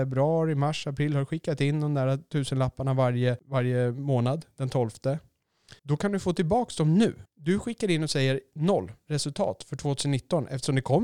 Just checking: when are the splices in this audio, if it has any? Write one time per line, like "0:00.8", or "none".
0:05.8
0:07.2

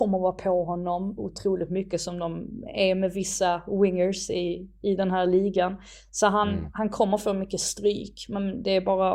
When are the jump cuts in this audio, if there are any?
none

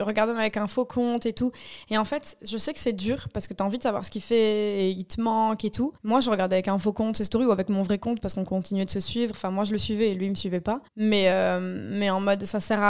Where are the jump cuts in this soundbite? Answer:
0:06.0
0:10.9

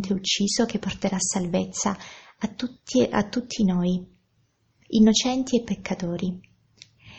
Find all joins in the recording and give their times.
none

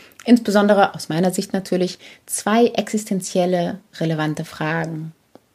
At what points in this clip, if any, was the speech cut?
none

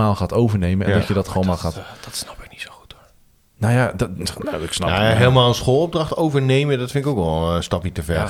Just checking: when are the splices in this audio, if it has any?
none

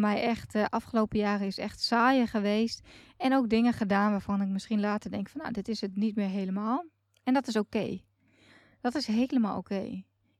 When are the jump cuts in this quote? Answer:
none

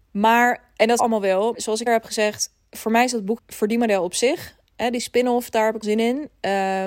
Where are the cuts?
0:01.0
0:01.5
0:01.9
0:03.4
0:05.8

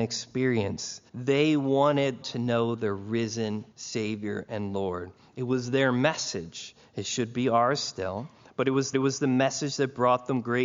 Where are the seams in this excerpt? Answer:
0:01.1
0:02.2
0:03.7
0:08.9

